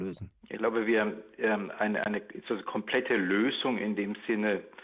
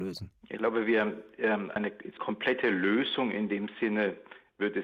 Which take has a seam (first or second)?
second